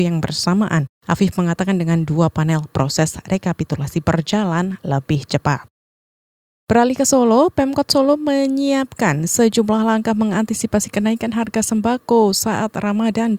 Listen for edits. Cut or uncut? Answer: uncut